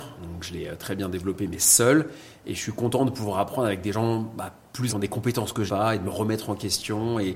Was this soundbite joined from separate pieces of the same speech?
yes; 2 cuts; at 4.9 s, 5.7 s

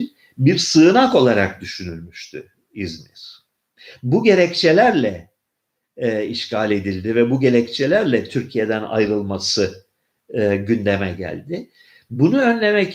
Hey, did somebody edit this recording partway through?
no; 0 cuts

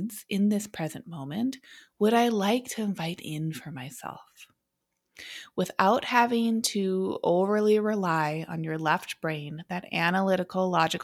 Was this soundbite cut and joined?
no; 0 cuts

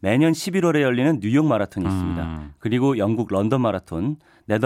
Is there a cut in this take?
no; 0 cuts

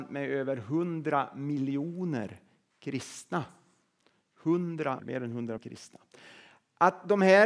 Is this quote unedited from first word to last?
no; 2 cuts; at 5.0 s, 5.6 s

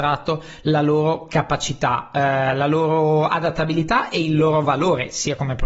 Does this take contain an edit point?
no; 0 cuts

